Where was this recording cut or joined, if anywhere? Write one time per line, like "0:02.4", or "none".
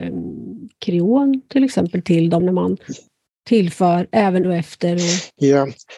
0:02.4
0:04.4